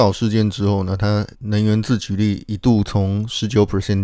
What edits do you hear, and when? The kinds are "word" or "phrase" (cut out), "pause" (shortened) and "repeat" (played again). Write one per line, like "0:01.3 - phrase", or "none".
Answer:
0:01.3 - pause